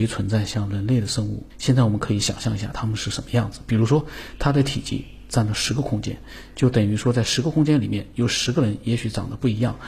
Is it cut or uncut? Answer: cut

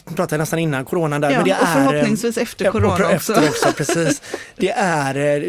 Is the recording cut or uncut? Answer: cut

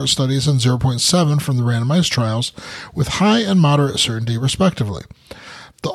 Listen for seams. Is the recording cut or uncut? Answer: uncut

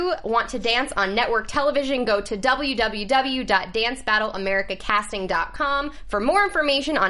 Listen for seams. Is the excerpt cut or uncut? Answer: uncut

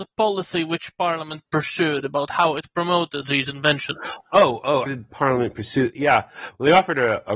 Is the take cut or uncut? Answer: cut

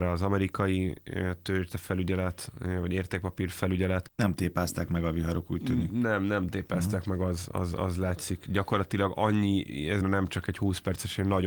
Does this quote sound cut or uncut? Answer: cut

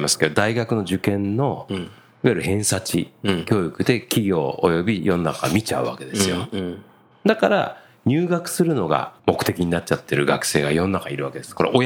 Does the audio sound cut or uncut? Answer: cut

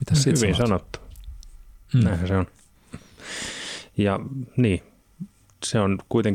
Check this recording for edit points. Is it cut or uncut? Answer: uncut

